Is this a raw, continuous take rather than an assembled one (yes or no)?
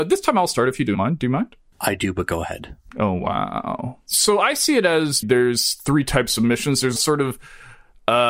no